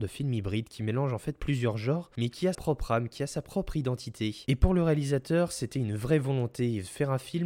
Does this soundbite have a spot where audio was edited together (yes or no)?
yes